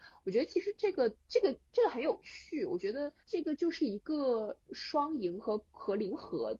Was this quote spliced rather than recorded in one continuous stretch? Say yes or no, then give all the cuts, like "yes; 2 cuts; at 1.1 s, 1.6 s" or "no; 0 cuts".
yes; 2 cuts; at 1.2 s, 3.2 s